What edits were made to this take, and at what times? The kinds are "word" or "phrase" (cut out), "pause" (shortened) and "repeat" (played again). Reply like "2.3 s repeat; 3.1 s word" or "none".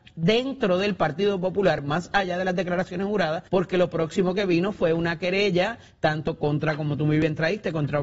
3.5 s pause